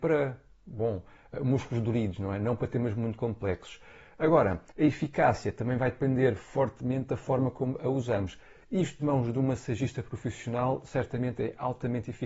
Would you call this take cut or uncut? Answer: cut